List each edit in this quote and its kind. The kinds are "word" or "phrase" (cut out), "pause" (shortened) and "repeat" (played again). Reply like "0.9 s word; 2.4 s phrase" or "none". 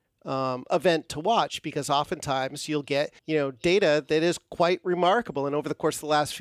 3.2 s pause